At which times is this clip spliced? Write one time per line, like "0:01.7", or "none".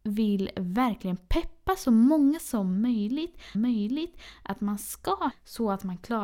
0:03.5
0:05.3